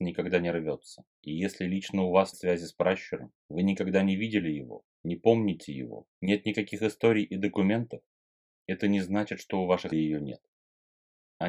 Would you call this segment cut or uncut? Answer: cut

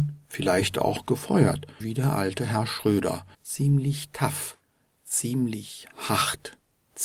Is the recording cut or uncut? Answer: cut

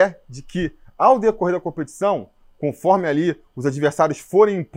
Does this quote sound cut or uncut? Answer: uncut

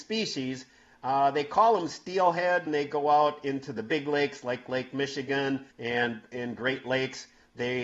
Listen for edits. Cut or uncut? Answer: cut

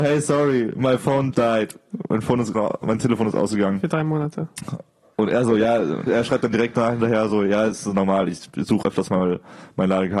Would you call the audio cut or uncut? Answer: cut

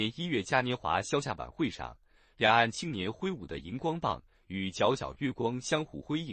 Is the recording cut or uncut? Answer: uncut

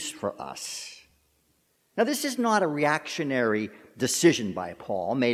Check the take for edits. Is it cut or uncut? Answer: uncut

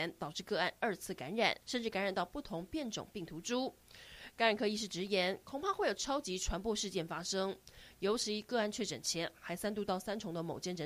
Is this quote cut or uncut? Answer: cut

